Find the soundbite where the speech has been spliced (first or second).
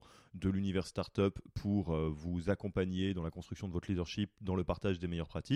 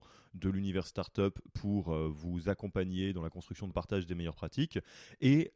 second